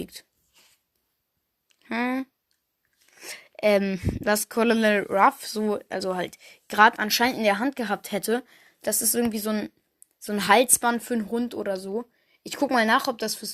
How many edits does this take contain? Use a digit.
0